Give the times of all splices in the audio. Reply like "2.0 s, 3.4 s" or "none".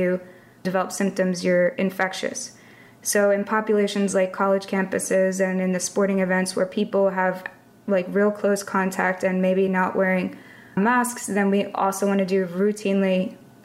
none